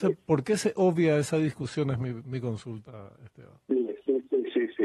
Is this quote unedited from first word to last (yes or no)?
yes